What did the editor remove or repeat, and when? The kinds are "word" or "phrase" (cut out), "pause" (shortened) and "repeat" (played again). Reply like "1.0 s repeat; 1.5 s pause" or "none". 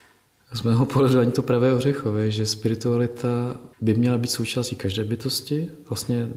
3.7 s pause

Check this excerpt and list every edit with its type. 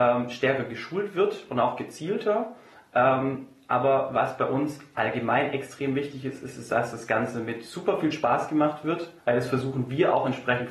9.2 s pause

